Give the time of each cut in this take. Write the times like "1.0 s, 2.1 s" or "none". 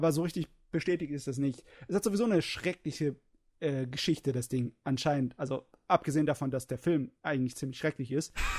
none